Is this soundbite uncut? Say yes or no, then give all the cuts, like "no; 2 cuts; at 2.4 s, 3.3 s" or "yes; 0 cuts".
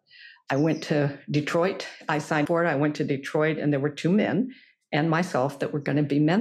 no; 1 cut; at 2.5 s